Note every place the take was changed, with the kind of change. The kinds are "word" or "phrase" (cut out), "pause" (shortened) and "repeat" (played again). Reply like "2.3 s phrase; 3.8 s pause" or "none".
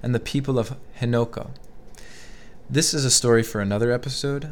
none

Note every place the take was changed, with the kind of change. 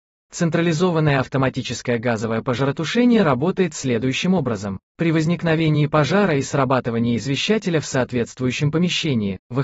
4.9 s pause

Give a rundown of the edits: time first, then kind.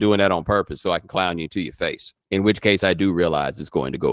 2.2 s pause

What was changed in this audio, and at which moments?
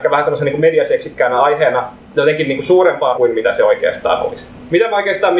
3.1 s word

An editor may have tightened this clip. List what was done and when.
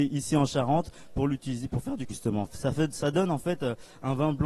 2.1 s word

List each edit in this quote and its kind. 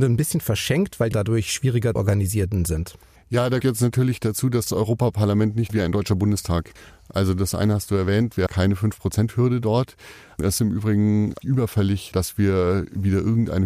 1.1 s word; 2.0 s word; 3.6 s word; 4.7 s word; 5.7 s word; 8.5 s word; 10.6 s word; 11.4 s word

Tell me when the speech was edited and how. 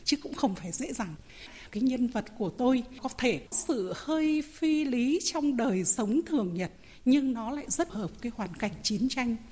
3.5 s word; 7.9 s word; 8.2 s word

